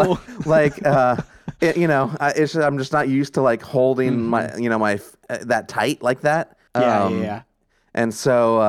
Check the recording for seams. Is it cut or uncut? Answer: cut